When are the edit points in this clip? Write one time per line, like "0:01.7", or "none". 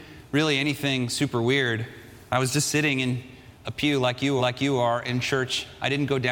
0:03.5
0:04.4